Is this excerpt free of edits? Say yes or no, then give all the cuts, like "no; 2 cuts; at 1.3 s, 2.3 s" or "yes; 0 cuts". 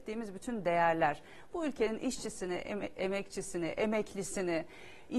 yes; 0 cuts